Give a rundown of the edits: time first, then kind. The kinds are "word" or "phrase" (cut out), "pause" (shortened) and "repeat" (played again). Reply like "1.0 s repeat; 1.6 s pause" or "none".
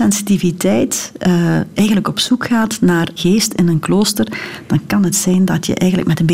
3.2 s word